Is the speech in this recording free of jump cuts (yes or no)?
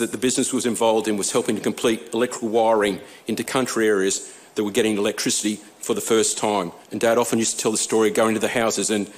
no